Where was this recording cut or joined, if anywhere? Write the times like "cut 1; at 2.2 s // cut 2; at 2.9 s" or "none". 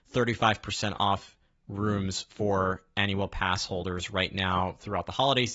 none